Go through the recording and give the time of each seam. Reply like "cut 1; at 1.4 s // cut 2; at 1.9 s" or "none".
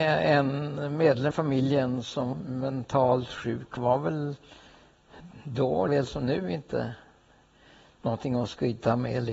cut 1; at 1.3 s // cut 2; at 2.3 s // cut 3; at 3.8 s // cut 4; at 5.9 s